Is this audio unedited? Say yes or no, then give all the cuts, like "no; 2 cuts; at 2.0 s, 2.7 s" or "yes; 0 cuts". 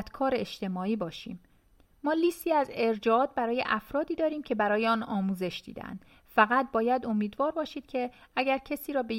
yes; 0 cuts